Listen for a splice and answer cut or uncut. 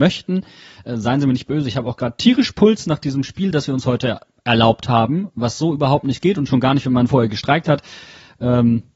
uncut